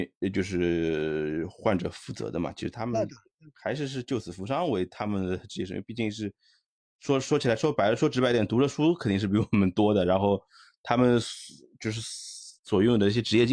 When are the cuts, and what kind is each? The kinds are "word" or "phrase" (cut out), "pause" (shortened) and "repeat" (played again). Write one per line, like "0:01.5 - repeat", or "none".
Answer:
none